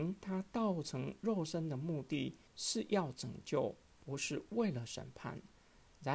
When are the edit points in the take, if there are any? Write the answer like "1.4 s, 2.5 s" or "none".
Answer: 2.5 s